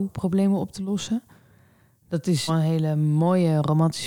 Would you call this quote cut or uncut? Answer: cut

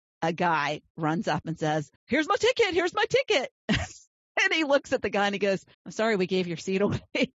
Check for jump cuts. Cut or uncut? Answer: cut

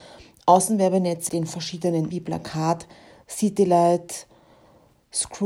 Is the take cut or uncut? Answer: cut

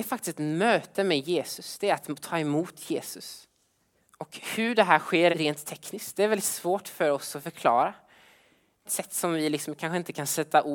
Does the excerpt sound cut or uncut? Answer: cut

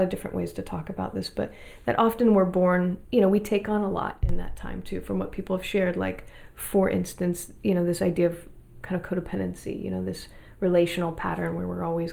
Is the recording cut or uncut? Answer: cut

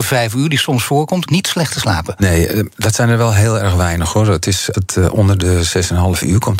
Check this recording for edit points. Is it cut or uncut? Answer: cut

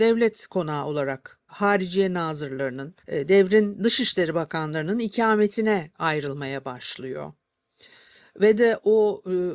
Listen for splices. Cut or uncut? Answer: cut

